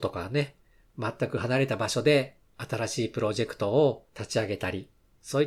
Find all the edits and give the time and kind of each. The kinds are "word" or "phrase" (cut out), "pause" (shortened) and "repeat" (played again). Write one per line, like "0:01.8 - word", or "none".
0:04.1 - pause